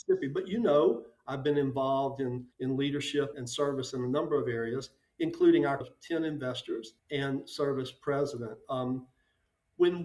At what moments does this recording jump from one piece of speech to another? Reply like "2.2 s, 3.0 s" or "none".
2.5 s, 3.3 s, 5.8 s, 7.0 s